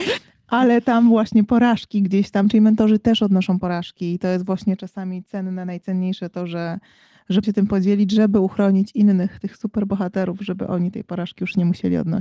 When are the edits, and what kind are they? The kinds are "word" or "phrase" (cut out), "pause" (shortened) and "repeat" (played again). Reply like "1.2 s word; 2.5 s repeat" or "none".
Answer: 7.4 s word